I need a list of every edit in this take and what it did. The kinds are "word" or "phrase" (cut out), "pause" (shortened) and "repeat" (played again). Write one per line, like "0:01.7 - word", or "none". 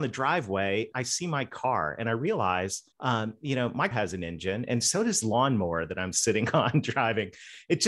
0:00.9 - word
0:02.9 - pause
0:03.9 - word
0:05.2 - word